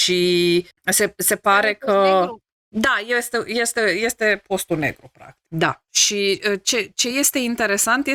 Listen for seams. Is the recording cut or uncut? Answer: uncut